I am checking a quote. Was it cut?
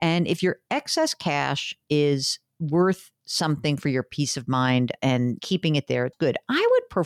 yes; 2 cuts; at 5.4 s, 6.1 s

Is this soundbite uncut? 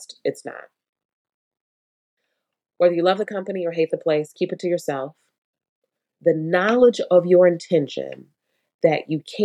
yes; 0 cuts

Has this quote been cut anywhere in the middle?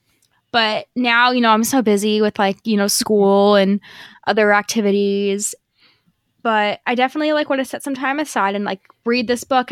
no; 0 cuts

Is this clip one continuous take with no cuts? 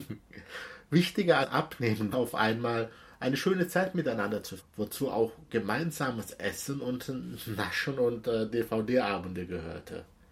no; 3 cuts; at 1.4 s, 2.1 s, 4.6 s

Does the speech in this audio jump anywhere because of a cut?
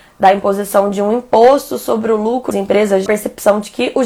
yes; 2 cuts; at 2.5 s, 3.1 s

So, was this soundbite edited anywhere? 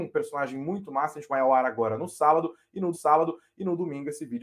yes; 2 cuts; at 1.3 s, 2.9 s

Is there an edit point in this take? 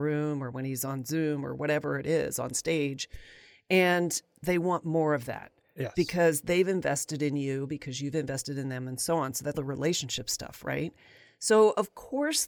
yes; 1 cut; at 9.5 s

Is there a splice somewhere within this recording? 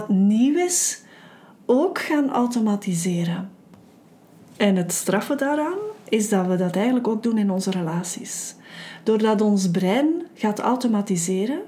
no; 0 cuts

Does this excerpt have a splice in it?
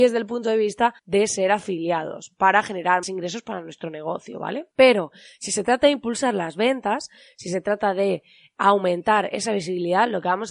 yes; 3 cuts; at 1.0 s, 3.0 s, 4.7 s

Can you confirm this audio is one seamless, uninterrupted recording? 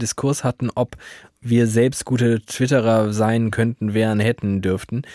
yes; 0 cuts

